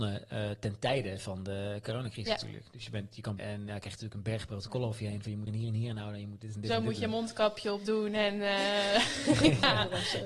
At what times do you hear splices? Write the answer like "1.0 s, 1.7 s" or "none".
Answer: 3.4 s, 5.5 s